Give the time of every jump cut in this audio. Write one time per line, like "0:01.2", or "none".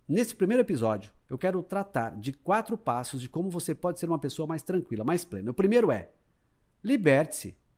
0:01.2